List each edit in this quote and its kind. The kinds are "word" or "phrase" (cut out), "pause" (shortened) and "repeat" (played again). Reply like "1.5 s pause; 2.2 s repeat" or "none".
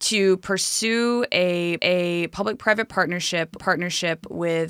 1.8 s repeat; 3.6 s repeat